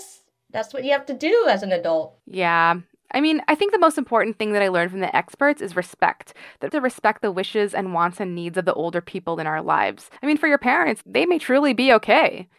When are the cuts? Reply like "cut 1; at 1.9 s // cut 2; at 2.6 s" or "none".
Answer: cut 1; at 2.2 s // cut 2; at 6.7 s // cut 3; at 10.2 s // cut 4; at 11.0 s